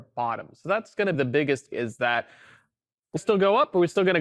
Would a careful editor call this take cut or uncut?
cut